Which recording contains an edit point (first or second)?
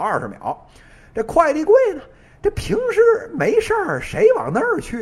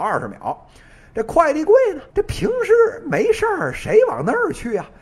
second